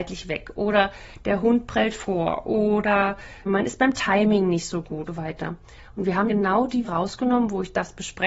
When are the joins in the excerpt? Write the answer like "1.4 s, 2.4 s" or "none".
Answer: 3.5 s, 5.1 s, 6.3 s, 6.8 s